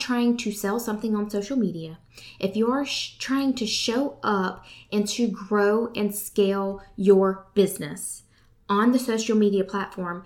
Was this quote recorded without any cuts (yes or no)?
yes